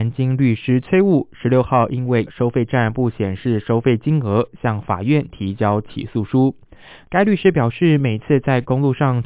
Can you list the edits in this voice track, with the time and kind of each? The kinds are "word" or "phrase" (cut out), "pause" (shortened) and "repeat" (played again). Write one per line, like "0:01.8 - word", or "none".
0:02.2 - word